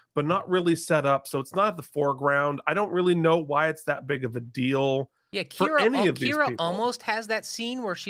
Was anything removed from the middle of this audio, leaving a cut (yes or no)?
no